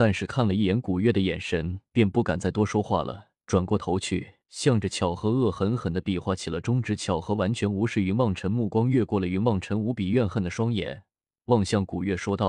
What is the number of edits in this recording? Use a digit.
2